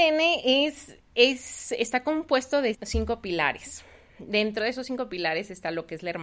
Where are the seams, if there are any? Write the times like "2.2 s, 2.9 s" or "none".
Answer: 2.7 s